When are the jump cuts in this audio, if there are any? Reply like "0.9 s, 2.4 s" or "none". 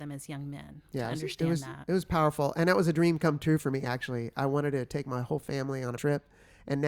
6.0 s